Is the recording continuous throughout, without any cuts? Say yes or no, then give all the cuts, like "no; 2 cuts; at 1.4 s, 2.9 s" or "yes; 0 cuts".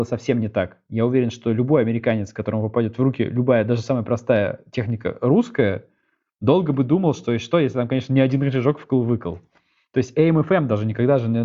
yes; 0 cuts